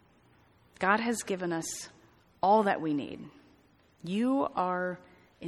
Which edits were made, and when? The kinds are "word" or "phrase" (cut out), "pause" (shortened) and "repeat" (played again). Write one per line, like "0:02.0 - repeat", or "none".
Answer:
none